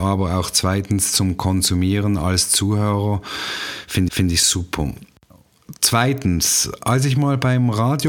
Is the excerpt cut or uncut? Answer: cut